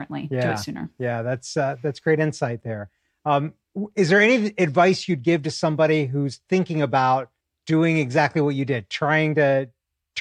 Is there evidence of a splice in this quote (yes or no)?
yes